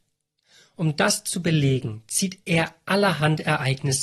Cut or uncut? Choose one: uncut